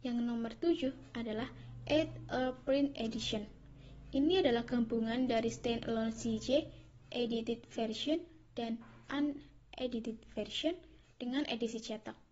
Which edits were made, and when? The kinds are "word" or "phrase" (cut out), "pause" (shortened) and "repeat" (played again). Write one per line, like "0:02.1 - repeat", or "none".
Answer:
none